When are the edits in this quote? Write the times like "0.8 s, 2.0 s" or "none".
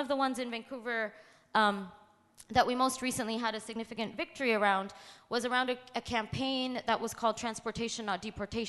none